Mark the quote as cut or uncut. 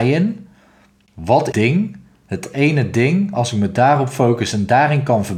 cut